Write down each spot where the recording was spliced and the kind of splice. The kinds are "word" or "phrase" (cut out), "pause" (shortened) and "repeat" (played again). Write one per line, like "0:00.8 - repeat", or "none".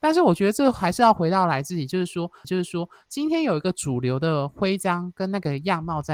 0:02.4 - repeat